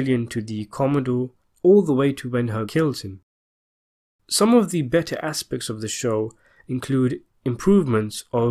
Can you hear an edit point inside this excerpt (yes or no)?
yes